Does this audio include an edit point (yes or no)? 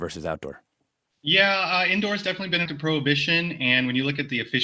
yes